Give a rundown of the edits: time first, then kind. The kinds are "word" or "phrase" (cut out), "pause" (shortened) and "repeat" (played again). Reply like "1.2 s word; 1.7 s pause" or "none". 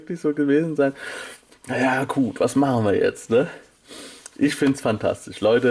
none